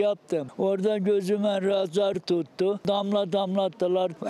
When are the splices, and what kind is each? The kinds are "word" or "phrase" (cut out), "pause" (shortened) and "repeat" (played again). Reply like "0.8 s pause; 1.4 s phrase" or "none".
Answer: none